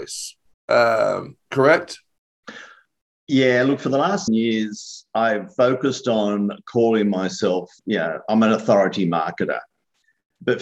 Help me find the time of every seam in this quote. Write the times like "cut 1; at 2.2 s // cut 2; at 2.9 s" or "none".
cut 1; at 4.3 s // cut 2; at 7.8 s